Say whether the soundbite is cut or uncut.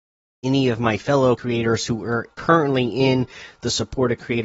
cut